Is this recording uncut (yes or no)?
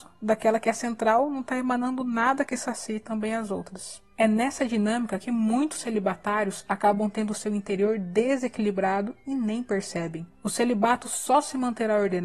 yes